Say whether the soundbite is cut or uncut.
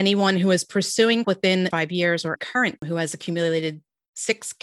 cut